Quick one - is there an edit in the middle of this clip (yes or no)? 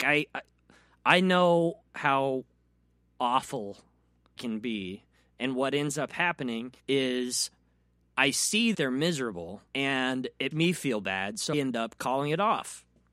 yes